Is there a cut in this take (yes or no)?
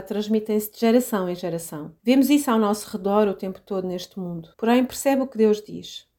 yes